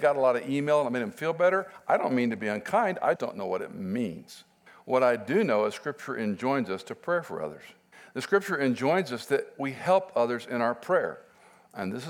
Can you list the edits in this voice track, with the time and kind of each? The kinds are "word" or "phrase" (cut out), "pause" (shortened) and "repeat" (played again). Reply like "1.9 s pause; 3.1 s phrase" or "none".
3.2 s word; 4.7 s pause; 7.9 s pause